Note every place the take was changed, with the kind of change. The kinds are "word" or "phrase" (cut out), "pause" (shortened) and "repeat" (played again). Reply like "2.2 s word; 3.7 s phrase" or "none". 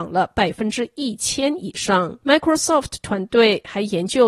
2.2 s pause